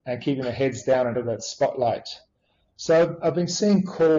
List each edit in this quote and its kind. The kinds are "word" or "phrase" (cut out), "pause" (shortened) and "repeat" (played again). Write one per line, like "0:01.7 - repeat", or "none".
0:01.1 - word